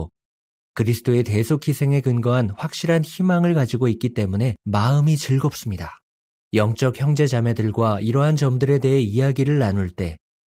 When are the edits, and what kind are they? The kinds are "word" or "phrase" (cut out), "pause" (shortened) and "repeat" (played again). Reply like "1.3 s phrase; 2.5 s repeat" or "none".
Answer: 4.6 s pause; 6.3 s pause